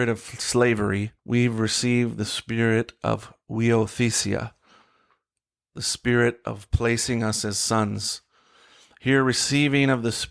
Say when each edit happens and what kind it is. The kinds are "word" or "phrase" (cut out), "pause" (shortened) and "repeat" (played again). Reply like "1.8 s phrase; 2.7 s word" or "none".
1.2 s pause